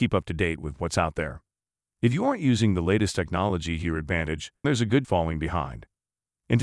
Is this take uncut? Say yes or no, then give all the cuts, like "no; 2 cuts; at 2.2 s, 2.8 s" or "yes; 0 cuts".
no; 2 cuts; at 4.6 s, 5.0 s